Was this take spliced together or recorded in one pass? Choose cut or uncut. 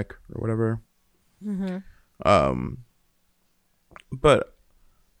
uncut